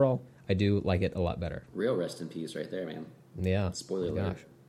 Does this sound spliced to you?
no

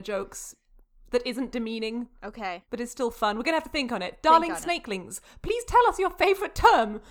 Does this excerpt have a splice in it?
yes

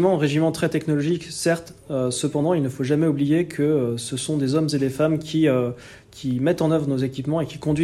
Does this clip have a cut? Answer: no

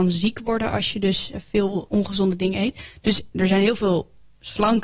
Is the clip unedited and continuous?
yes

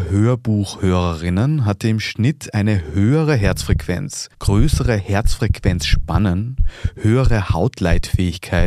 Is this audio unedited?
no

